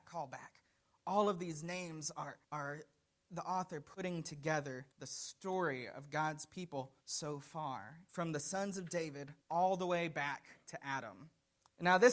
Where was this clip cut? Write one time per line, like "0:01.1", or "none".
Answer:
0:02.4
0:04.9
0:07.0
0:08.1
0:09.4
0:10.6